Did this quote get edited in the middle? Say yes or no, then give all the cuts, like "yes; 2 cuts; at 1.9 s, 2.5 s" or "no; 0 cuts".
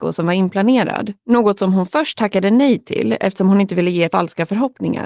yes; 2 cuts; at 1.2 s, 4.1 s